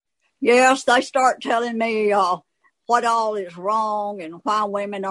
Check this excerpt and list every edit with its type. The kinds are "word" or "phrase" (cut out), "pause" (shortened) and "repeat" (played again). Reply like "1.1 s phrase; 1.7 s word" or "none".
none